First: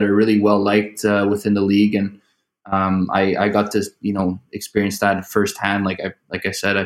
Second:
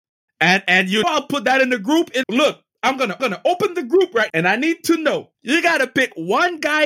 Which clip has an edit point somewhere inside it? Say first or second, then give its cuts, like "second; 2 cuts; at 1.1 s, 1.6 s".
second; 5 cuts; at 1.0 s, 2.2 s, 3.2 s, 4.3 s, 5.3 s